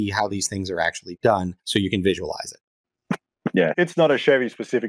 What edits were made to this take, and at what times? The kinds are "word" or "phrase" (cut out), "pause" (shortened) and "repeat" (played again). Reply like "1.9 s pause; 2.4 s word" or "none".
1.6 s pause; 3.7 s word